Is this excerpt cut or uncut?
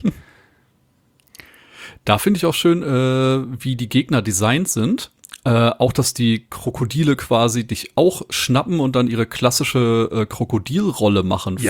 uncut